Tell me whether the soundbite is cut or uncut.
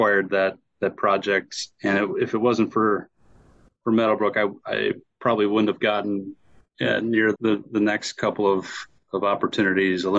cut